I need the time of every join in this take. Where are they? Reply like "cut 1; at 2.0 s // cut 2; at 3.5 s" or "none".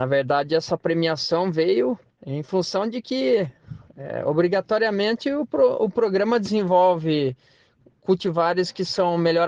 cut 1; at 2.1 s